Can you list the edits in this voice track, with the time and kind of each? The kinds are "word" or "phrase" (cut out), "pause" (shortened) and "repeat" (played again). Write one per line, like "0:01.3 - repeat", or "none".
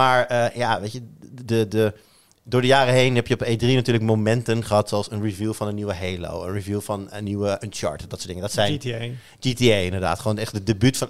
none